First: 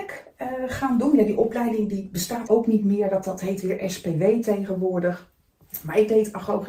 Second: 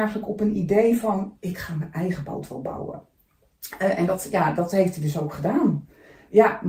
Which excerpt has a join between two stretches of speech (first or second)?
first